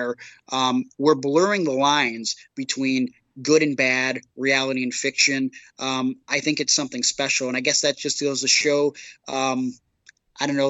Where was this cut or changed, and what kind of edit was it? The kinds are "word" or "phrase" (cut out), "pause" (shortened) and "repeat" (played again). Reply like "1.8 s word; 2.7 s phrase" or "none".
none